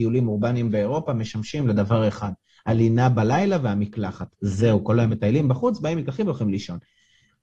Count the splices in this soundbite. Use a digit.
0